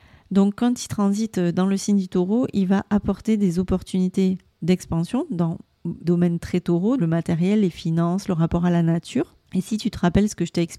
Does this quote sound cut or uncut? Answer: cut